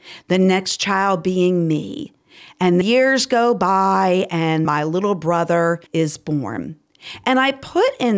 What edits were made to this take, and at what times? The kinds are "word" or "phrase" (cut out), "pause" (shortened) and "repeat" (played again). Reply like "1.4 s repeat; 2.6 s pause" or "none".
2.8 s word; 4.7 s word; 5.9 s pause